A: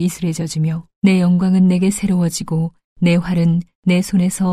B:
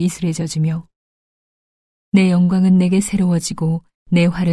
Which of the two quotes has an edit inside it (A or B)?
A